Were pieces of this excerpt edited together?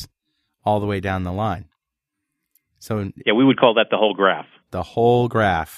no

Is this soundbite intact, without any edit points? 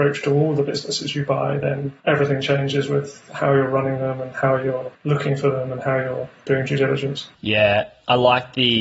no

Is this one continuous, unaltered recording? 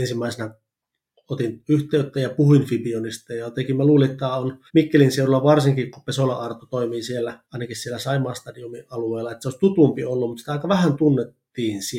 no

